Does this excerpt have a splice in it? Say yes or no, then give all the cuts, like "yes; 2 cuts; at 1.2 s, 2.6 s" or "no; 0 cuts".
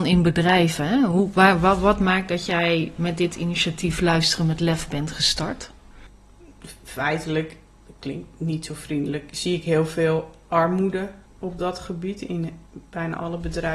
yes; 1 cut; at 11.3 s